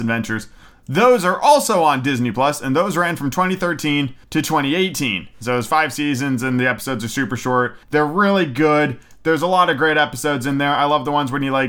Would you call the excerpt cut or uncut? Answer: cut